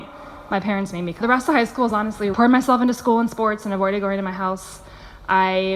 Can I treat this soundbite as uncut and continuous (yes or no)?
no